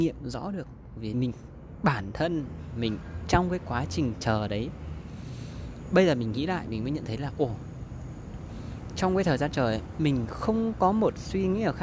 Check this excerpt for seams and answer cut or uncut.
cut